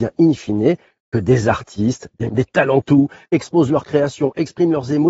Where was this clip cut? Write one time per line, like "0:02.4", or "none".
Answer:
0:02.3
0:02.8